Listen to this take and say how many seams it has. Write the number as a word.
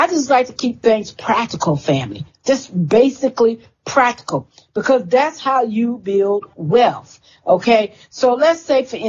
zero